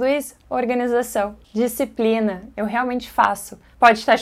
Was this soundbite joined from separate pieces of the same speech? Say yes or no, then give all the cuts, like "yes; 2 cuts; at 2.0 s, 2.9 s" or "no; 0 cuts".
no; 0 cuts